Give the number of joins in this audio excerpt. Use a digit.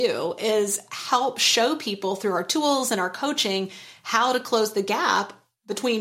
0